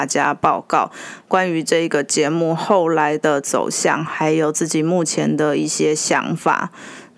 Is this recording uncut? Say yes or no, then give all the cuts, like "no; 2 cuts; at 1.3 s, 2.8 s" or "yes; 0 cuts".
yes; 0 cuts